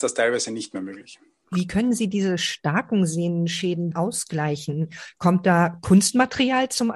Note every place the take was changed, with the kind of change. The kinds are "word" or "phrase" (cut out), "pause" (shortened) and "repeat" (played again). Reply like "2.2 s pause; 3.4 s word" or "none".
3.9 s phrase